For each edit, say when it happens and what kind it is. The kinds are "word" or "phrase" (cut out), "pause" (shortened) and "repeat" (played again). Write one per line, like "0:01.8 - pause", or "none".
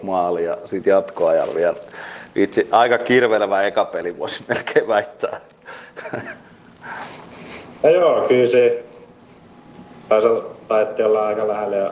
none